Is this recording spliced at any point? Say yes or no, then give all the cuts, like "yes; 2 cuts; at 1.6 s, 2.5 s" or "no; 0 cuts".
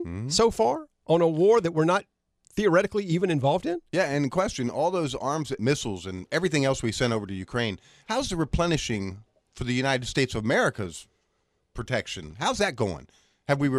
yes; 1 cut; at 5.6 s